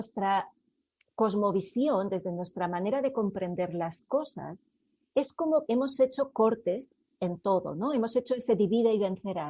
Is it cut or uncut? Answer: cut